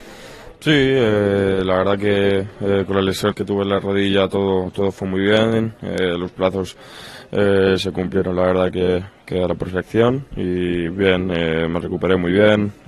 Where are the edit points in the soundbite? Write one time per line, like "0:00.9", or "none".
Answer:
0:03.3